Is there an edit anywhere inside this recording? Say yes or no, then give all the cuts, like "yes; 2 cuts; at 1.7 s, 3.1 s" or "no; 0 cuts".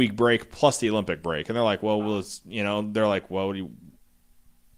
no; 0 cuts